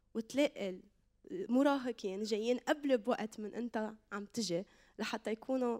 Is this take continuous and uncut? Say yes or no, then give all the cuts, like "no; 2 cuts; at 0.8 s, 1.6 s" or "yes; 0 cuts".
yes; 0 cuts